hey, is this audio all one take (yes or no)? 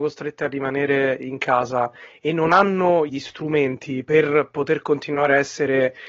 no